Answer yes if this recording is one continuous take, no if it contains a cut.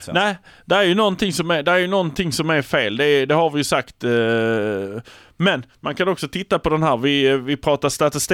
yes